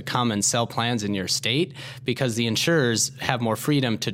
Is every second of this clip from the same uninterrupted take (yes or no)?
yes